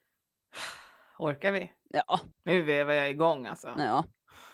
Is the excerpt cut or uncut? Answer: cut